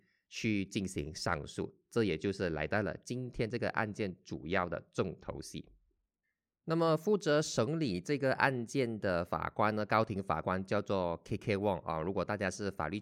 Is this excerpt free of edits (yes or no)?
yes